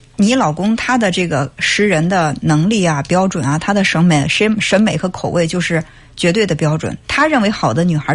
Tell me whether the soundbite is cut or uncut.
uncut